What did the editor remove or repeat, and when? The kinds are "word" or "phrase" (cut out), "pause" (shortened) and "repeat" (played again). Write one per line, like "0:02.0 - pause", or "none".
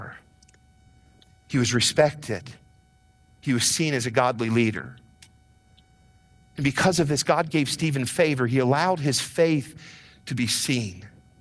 none